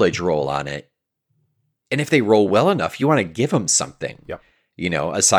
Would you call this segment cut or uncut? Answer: uncut